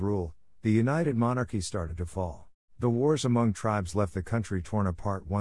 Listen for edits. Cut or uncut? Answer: cut